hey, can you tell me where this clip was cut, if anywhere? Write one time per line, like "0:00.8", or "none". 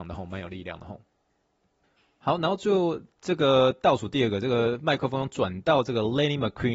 none